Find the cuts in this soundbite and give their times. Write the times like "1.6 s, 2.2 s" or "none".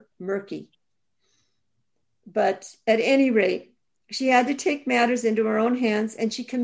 none